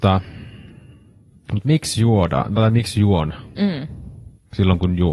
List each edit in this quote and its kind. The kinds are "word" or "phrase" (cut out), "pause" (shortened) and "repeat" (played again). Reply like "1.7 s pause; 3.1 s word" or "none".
none